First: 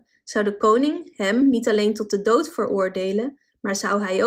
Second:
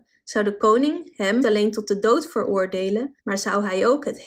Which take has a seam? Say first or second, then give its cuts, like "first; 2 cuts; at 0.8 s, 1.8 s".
second; 2 cuts; at 1.4 s, 3.2 s